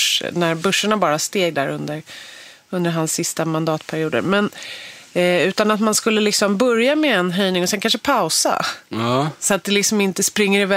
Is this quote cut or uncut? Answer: uncut